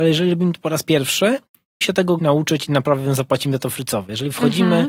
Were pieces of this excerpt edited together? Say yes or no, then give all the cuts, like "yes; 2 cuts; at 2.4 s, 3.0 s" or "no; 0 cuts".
yes; 2 cuts; at 1.8 s, 2.2 s